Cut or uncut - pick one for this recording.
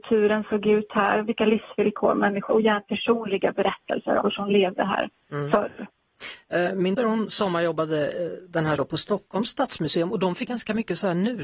cut